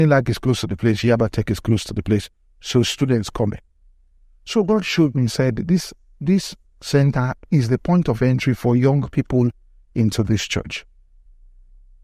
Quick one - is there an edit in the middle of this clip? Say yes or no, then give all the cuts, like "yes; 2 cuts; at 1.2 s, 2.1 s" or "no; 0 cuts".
no; 0 cuts